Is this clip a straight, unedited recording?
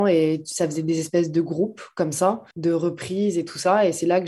no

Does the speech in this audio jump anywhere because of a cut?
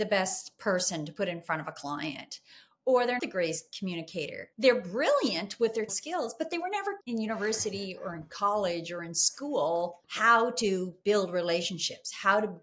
yes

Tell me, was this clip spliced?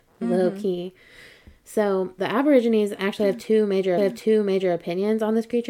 yes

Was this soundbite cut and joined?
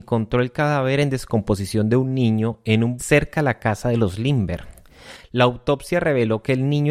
yes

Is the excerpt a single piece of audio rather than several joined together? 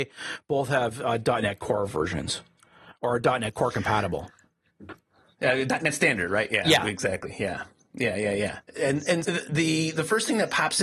no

